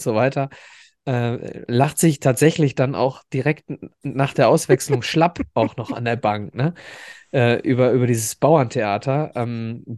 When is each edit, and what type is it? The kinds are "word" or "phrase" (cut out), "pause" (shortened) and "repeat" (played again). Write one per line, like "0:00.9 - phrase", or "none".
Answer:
none